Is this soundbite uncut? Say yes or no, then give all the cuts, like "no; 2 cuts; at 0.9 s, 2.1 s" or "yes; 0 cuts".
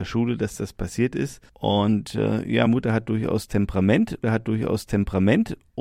no; 3 cuts; at 1.5 s, 2.7 s, 4.2 s